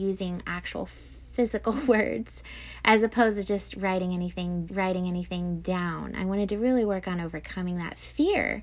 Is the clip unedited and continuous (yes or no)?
no